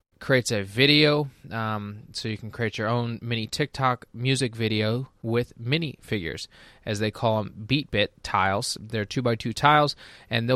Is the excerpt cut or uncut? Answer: uncut